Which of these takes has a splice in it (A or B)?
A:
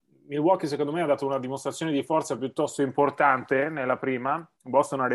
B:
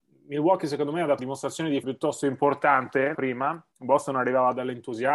B